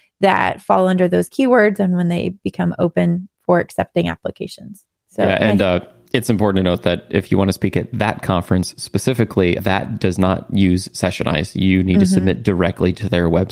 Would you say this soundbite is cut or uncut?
uncut